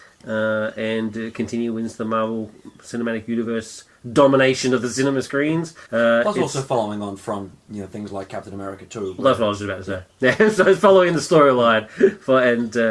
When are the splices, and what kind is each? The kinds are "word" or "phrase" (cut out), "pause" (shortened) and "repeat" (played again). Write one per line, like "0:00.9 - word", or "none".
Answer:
0:05.9 - pause